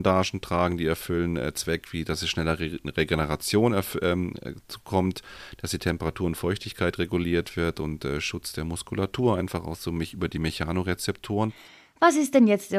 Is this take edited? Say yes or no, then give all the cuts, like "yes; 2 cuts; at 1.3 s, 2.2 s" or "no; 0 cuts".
no; 0 cuts